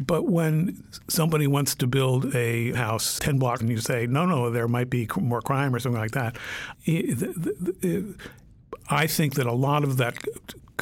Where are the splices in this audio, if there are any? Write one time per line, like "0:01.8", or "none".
0:02.7
0:03.2
0:03.6
0:06.7